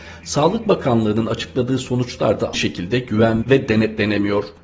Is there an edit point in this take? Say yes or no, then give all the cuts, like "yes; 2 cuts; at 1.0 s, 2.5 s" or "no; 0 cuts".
yes; 2 cuts; at 2.5 s, 3.4 s